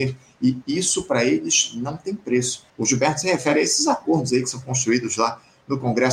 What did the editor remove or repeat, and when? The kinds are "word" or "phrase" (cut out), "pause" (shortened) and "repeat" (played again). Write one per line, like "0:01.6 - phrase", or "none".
0:02.7 - pause